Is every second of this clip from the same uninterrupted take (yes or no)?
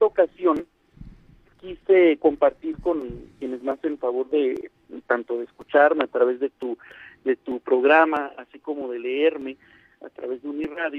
yes